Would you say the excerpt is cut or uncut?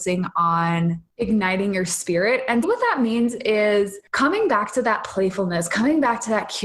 cut